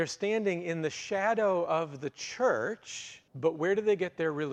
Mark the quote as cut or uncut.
cut